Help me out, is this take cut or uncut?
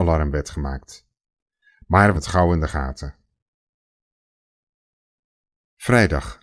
cut